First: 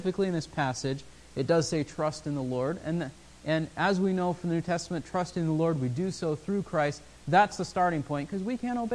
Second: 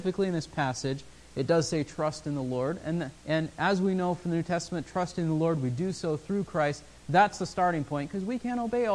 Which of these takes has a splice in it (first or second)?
second